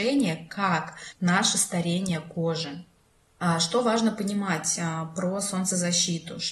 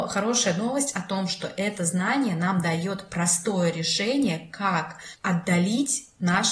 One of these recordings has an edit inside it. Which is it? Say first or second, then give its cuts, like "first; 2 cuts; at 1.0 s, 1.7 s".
first; 1 cut; at 1.1 s